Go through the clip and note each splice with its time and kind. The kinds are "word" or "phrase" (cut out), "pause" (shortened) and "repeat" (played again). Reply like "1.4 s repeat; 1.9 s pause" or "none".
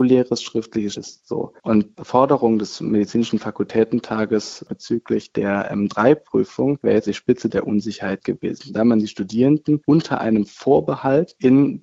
0.9 s word; 1.9 s word; 7.1 s word